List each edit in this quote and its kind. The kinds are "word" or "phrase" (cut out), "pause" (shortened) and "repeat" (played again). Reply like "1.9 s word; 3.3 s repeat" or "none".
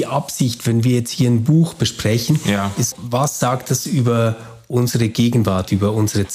2.9 s word